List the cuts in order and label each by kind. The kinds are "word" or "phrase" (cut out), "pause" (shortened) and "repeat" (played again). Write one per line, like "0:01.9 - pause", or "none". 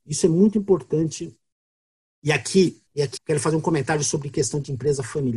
0:01.5 - pause
0:02.9 - pause
0:03.2 - word